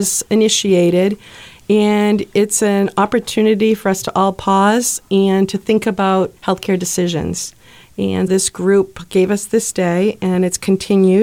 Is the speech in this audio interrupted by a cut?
yes; 2 cuts; at 6.4 s, 8.3 s

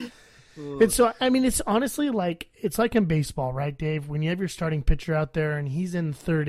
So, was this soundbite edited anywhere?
no; 0 cuts

